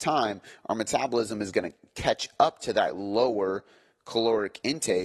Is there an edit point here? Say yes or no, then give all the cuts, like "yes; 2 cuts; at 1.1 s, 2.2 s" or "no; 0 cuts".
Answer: no; 0 cuts